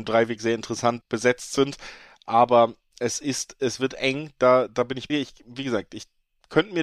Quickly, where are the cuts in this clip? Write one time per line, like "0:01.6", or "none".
0:01.0
0:05.1

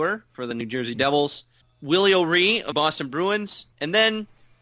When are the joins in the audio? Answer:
0:01.6
0:02.7
0:03.7

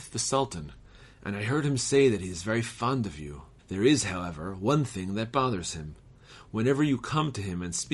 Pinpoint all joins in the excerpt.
0:03.6

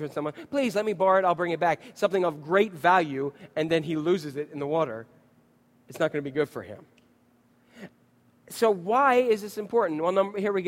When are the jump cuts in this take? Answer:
none

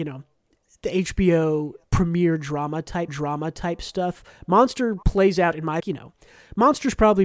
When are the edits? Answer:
0:01.8
0:03.1
0:05.0
0:05.8

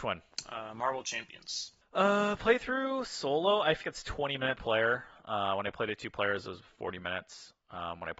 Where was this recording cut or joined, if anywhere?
0:03.8
0:04.6

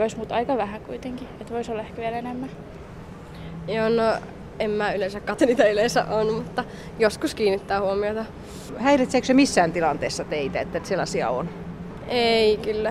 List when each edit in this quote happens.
0:05.4

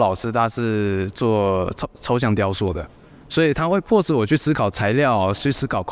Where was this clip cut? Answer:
none

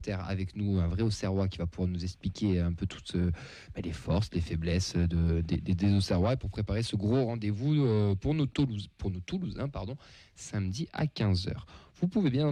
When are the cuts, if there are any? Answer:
none

